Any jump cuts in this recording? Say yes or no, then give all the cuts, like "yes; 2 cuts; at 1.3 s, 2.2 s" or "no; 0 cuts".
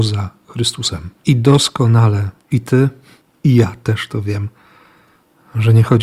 yes; 2 cuts; at 1.2 s, 2.5 s